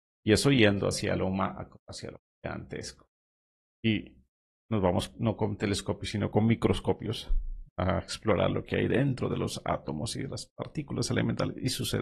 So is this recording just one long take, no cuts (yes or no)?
yes